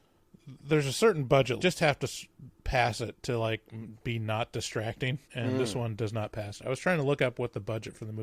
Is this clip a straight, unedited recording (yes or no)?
no